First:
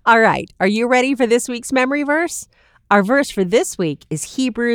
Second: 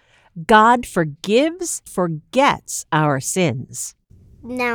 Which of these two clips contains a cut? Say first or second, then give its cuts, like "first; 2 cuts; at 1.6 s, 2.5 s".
second; 1 cut; at 1.9 s